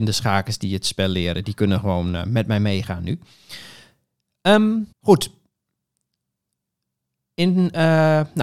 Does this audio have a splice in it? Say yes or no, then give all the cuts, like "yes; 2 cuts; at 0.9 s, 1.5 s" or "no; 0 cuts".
yes; 1 cut; at 4.9 s